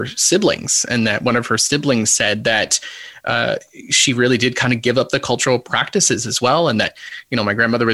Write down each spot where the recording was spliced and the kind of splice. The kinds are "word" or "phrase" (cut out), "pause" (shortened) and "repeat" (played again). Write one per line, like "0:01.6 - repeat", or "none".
none